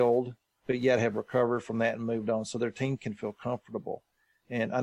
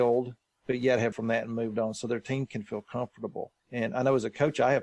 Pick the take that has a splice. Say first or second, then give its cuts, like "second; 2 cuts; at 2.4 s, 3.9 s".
second; 2 cuts; at 1.1 s, 3.6 s